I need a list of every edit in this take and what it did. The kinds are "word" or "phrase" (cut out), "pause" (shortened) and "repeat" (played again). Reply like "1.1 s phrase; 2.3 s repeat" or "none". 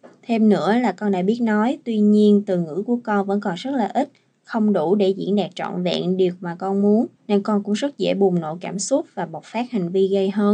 7.2 s pause